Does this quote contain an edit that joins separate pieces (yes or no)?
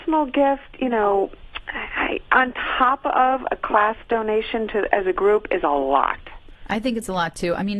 no